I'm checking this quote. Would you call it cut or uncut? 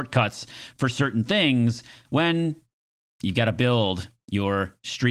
uncut